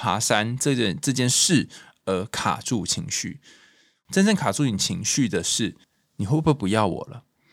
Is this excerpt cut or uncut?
cut